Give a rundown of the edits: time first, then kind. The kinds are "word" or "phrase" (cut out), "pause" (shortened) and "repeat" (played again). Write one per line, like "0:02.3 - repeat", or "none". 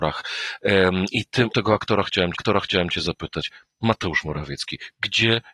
0:01.5 - word
0:02.3 - repeat